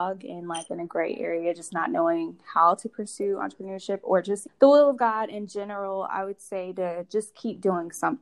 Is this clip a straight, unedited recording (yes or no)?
no